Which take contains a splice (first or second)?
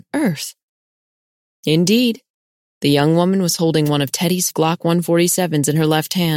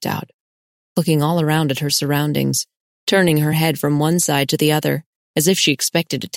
first